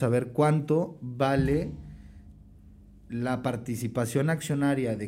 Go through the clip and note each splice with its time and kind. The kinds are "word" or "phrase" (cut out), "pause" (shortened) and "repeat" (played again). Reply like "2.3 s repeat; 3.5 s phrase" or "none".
none